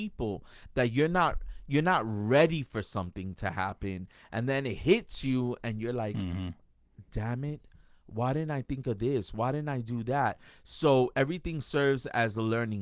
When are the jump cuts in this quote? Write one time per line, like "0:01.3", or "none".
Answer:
none